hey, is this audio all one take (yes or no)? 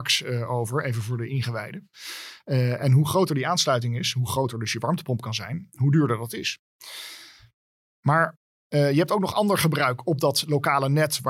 yes